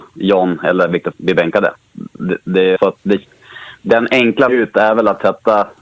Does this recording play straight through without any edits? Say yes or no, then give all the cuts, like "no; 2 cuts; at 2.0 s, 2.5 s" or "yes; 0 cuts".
no; 3 cuts; at 1.1 s, 2.8 s, 4.5 s